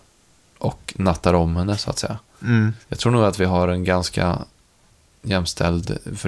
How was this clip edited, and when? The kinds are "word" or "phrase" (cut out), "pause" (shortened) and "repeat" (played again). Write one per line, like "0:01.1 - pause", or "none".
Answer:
0:02.8 - pause